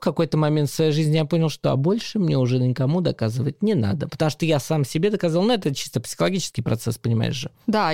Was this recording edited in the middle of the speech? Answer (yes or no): no